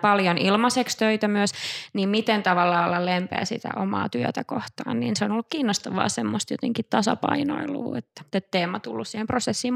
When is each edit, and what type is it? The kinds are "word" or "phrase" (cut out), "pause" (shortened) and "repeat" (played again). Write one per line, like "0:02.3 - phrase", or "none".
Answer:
0:08.3 - pause